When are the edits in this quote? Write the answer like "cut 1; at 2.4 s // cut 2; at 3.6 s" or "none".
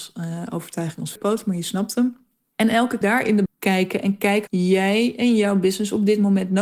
cut 1; at 1.2 s // cut 2; at 3.0 s // cut 3; at 3.5 s // cut 4; at 4.5 s